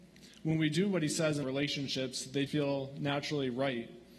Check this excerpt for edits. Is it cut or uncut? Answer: cut